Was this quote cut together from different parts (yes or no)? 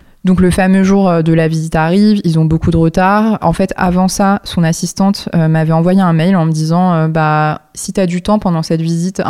no